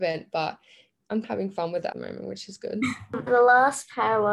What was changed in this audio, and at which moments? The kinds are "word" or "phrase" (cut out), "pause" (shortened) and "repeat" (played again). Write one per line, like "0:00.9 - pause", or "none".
0:01.2 - word
0:01.9 - word
0:03.3 - word